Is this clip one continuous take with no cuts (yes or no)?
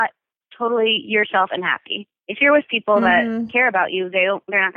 no